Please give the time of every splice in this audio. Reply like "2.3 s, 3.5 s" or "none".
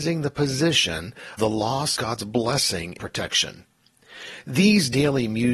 1.4 s, 2.0 s, 3.0 s